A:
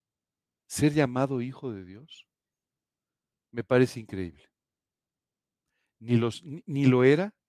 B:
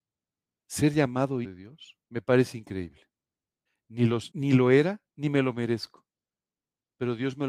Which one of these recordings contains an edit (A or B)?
B